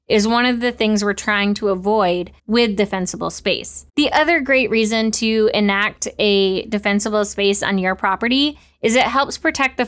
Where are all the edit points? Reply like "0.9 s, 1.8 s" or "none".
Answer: 2.4 s, 3.9 s